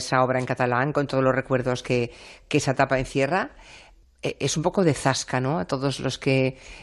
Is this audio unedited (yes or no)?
yes